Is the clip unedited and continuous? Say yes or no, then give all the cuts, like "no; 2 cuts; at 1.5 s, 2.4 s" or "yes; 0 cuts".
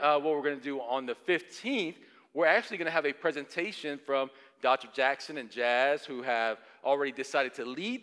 yes; 0 cuts